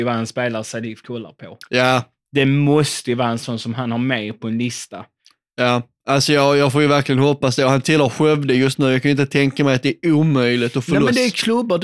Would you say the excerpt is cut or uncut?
uncut